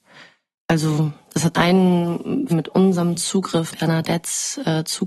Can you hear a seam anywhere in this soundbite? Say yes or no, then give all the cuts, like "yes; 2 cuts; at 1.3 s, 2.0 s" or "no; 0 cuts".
yes; 3 cuts; at 1.5 s, 2.5 s, 3.7 s